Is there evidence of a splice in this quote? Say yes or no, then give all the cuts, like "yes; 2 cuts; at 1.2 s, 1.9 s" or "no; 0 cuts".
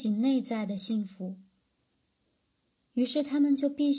no; 0 cuts